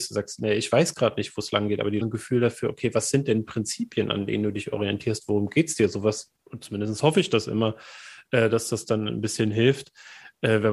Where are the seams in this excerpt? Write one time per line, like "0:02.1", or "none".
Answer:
0:02.0
0:06.4

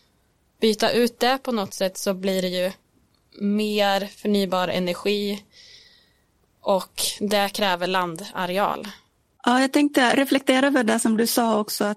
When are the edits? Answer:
none

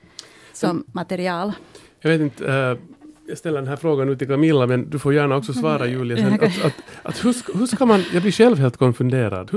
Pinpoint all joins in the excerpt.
none

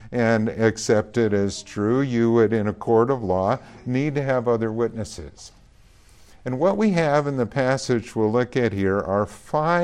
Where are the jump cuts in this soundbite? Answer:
none

